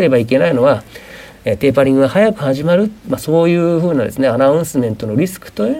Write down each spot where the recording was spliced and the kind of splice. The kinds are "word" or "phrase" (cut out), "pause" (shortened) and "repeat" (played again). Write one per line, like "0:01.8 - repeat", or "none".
none